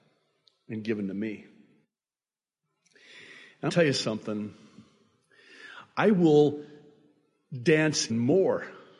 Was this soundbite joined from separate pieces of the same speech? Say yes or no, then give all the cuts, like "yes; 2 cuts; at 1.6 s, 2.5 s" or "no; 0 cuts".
yes; 2 cuts; at 3.7 s, 8.1 s